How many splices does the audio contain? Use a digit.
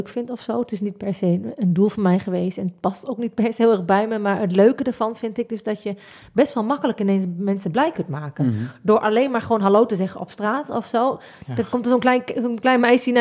0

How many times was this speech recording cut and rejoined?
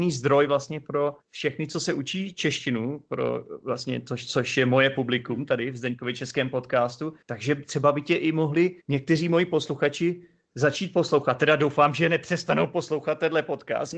3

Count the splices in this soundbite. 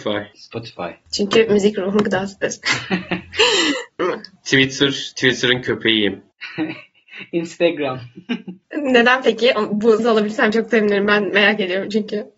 3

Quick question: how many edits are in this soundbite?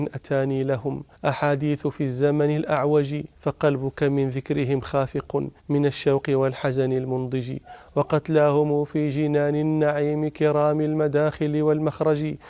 3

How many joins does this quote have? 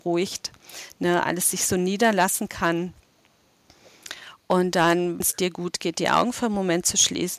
1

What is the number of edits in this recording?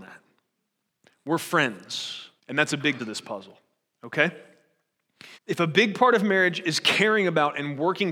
3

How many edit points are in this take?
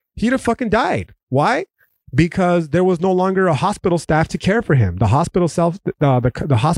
0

